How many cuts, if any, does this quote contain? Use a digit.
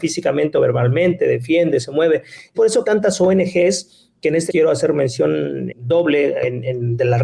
4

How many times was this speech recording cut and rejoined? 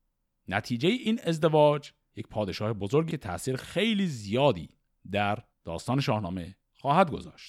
3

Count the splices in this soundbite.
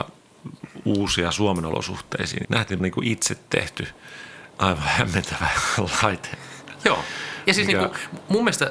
3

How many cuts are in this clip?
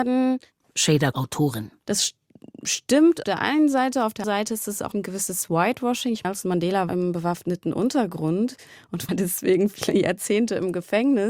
7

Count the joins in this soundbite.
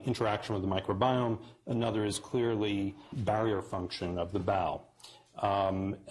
1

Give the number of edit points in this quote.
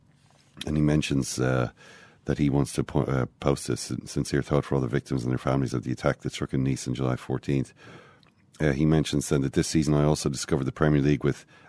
0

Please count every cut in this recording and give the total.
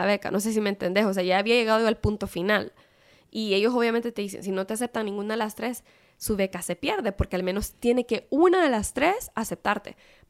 0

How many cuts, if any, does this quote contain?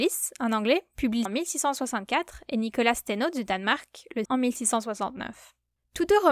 2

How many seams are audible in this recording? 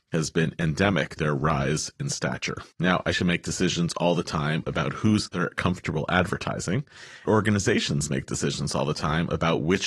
5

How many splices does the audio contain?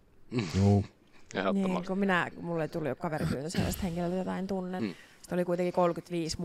2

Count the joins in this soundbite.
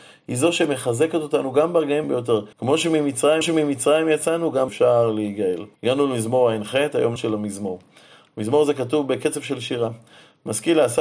6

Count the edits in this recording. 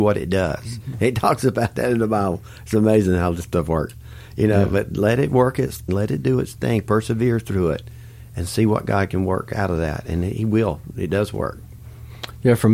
1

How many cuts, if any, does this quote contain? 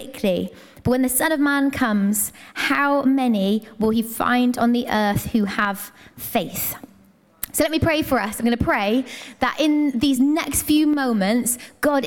0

